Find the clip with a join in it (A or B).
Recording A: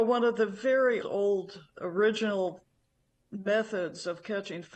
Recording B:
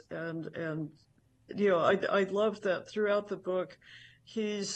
A